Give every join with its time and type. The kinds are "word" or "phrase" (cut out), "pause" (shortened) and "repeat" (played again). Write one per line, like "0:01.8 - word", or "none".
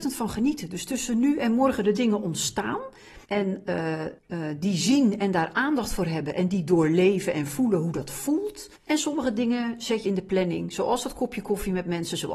0:03.2 - pause
0:04.2 - pause
0:08.7 - pause
0:10.0 - phrase